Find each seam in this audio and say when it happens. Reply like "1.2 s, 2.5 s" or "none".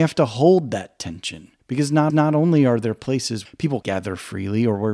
1.6 s, 2.1 s, 3.4 s, 3.8 s